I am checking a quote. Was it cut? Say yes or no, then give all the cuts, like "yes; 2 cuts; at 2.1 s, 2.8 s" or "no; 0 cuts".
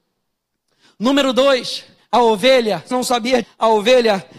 yes; 3 cuts; at 2.0 s, 2.9 s, 3.4 s